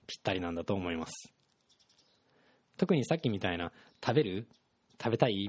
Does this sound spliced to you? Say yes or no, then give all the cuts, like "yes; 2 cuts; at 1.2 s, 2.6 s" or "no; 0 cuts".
no; 0 cuts